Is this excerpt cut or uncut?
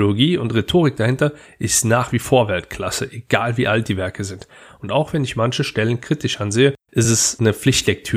uncut